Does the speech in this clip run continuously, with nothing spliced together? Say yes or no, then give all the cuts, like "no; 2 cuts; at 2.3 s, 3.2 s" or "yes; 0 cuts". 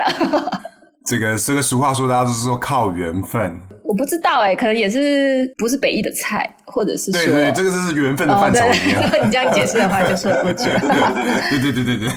yes; 0 cuts